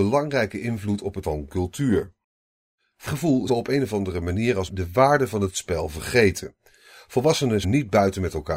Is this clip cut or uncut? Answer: cut